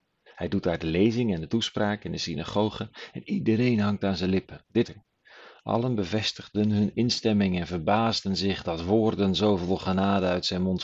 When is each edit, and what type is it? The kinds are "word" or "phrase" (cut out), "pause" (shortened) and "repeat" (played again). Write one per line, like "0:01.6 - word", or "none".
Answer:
0:04.8 - word